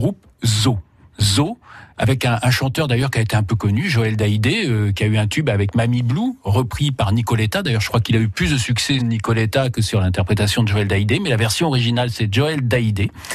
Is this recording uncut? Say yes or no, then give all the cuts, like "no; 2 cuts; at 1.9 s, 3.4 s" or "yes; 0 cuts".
no; 1 cut; at 9.0 s